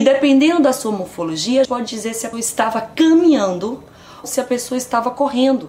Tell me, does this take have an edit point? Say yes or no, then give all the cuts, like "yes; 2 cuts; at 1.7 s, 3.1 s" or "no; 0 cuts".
yes; 3 cuts; at 1.6 s, 2.3 s, 4.2 s